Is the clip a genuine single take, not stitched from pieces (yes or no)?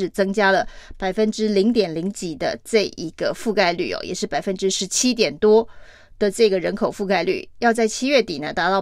yes